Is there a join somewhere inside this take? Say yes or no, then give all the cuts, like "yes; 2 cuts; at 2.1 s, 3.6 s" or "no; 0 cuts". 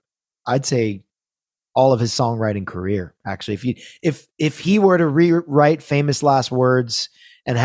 no; 0 cuts